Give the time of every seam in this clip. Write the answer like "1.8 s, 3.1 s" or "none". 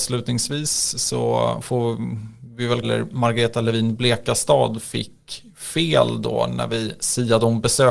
2.8 s

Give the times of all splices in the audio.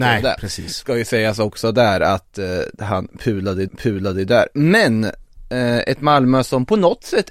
3.7 s

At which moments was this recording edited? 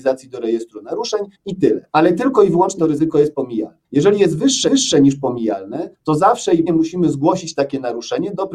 1.3 s, 1.9 s, 2.8 s, 3.8 s, 4.7 s, 5.9 s, 6.7 s

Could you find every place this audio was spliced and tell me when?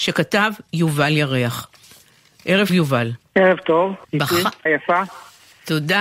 2.7 s, 3.3 s, 4.0 s, 4.7 s

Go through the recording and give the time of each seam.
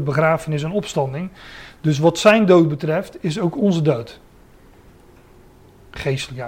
none

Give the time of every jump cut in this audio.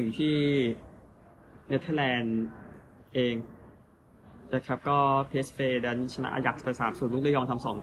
3.0 s

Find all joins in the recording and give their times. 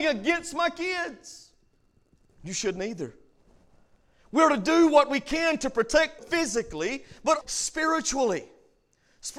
6.2 s, 7.4 s

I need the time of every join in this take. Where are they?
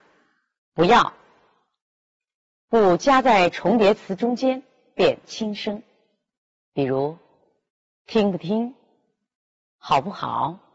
none

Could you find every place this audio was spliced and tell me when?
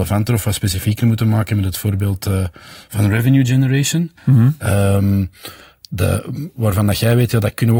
4.2 s

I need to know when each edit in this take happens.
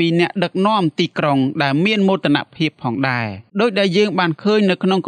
3.5 s

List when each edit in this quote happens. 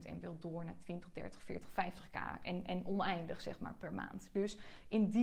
none

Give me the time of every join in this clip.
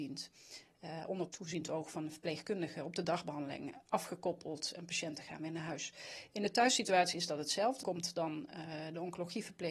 7.8 s

